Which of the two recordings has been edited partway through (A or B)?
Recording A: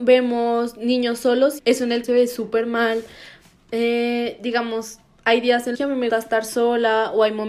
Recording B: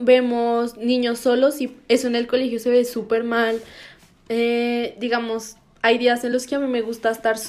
A